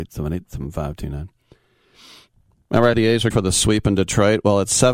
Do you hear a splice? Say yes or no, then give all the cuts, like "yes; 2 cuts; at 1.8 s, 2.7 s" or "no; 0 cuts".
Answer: yes; 2 cuts; at 2.9 s, 3.3 s